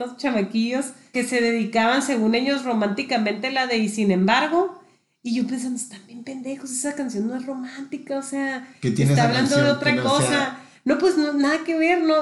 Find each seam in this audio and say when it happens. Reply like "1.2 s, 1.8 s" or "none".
1.1 s